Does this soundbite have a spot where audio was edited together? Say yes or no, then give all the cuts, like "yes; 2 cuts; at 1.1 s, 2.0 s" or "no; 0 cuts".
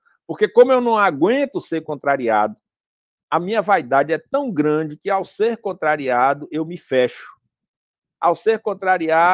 no; 0 cuts